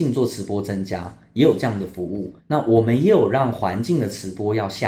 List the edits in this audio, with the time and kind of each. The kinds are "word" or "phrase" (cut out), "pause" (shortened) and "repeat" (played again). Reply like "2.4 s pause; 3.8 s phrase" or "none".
2.4 s pause